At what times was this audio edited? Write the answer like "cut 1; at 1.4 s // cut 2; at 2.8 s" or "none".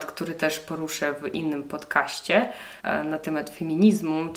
cut 1; at 2.8 s